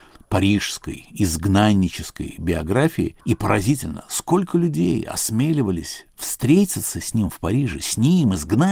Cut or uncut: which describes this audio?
cut